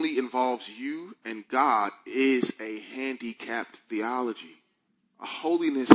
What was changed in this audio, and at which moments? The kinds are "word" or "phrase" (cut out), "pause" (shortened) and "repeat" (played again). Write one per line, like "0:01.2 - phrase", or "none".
0:04.9 - pause